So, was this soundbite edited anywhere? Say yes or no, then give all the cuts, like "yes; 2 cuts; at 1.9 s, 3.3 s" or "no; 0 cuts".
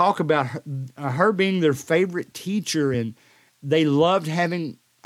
no; 0 cuts